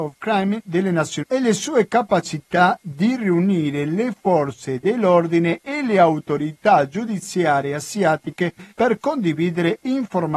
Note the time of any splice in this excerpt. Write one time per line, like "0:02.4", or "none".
0:01.2
0:08.7